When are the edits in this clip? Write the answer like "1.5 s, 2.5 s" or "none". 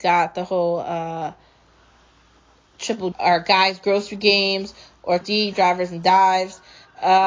3.1 s, 5.2 s, 5.5 s